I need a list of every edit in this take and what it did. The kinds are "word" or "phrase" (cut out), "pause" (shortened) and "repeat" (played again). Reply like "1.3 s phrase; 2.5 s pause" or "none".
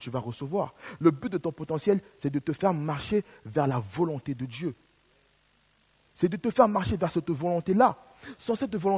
none